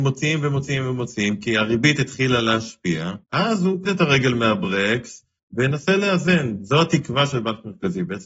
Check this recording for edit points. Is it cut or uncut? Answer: cut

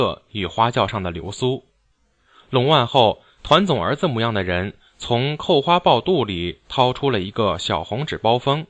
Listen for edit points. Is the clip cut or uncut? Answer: cut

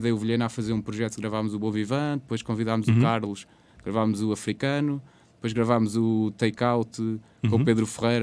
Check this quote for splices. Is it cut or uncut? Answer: uncut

